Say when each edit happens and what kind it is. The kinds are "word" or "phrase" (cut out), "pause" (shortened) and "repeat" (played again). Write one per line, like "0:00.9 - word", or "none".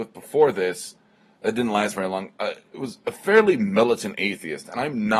none